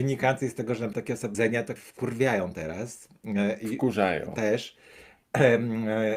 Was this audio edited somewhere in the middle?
yes; 3 cuts; at 0.9 s, 1.3 s, 1.8 s

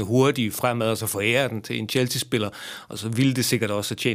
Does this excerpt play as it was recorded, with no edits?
yes; 0 cuts

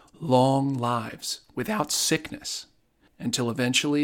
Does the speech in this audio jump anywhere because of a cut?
no; 0 cuts

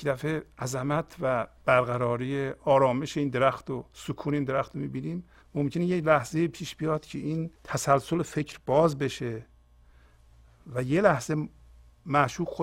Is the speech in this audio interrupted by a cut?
yes; 2 cuts; at 5.4 s, 7.6 s

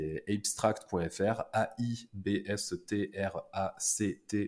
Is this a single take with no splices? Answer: yes; 0 cuts

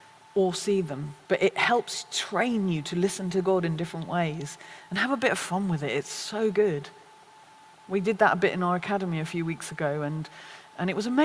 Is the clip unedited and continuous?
no; 1 cut; at 1.2 s

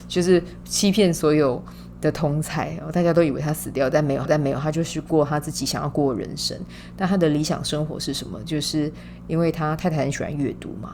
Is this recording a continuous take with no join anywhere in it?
no; 1 cut; at 4.3 s

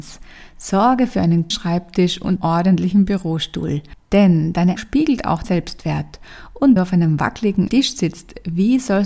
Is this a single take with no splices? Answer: no; 6 cuts; at 1.5 s, 2.4 s, 4.8 s, 5.4 s, 6.8 s, 7.7 s

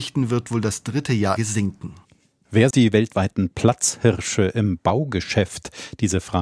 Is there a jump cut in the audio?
yes; 2 cuts; at 1.4 s, 2.7 s

